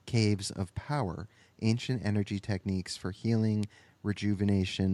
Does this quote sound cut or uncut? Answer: uncut